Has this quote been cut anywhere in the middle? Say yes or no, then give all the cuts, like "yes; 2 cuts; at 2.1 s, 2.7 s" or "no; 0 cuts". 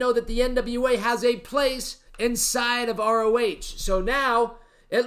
yes; 1 cut; at 2.1 s